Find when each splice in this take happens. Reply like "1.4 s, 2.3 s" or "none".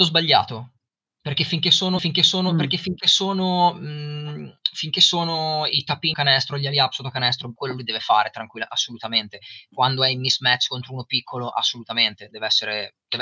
2.0 s, 6.1 s, 7.6 s

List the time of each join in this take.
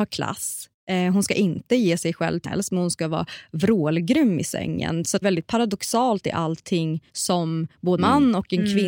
2.4 s, 5.2 s, 7.1 s, 8.0 s

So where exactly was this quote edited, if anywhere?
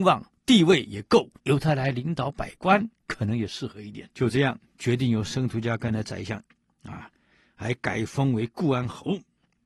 1.4 s, 2.9 s, 4.1 s

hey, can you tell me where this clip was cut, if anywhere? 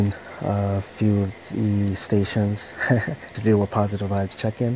3.3 s

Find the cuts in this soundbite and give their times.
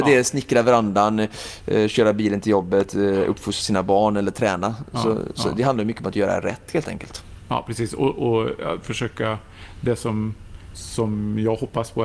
none

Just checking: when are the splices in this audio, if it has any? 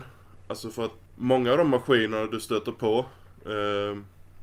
1.0 s

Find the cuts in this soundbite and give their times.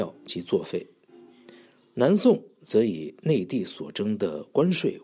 none

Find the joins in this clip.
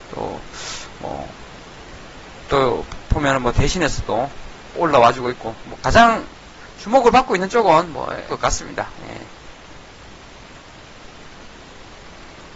2.5 s, 4.7 s, 8.3 s

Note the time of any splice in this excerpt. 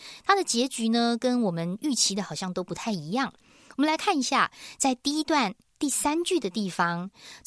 none

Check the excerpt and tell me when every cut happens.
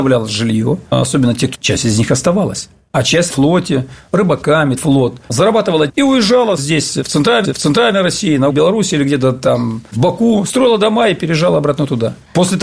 1.5 s, 3.3 s, 4.8 s, 5.9 s, 6.6 s, 7.4 s, 8.5 s

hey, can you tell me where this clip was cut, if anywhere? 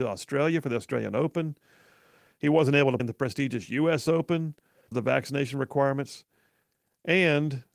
3.0 s, 4.9 s

